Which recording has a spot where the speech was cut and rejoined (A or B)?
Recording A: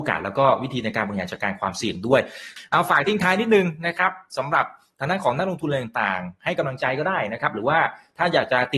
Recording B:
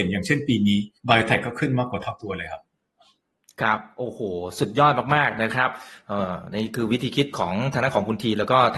B